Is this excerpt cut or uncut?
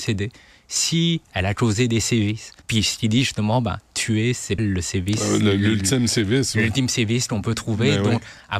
cut